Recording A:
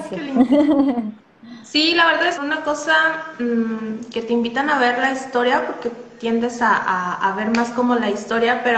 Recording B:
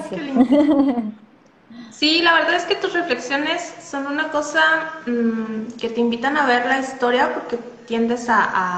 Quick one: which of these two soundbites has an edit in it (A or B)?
A